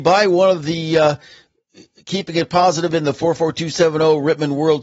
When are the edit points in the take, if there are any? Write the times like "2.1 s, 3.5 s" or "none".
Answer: none